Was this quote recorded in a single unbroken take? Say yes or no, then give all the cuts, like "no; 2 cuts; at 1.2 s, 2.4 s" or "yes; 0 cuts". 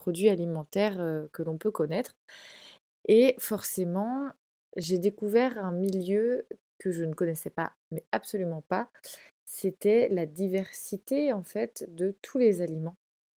yes; 0 cuts